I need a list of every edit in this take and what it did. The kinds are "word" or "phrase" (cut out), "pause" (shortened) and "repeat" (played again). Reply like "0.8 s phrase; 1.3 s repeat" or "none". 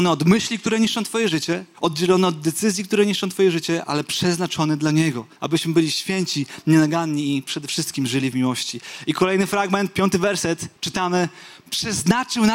1.7 s pause; 5.4 s pause; 10.8 s pause

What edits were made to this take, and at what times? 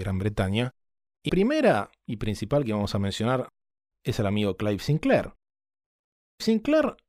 1.3 s word

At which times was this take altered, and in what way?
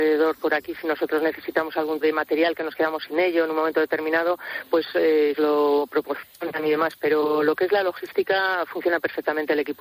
2.0 s word; 5.4 s phrase

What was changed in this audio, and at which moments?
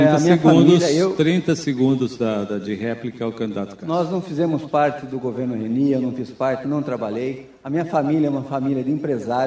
none

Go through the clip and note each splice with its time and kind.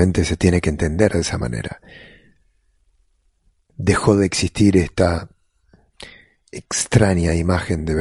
none

